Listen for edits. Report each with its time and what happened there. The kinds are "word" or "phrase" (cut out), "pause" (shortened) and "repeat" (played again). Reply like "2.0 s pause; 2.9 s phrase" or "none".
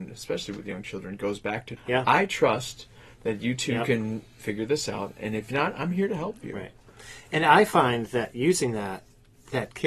1.8 s word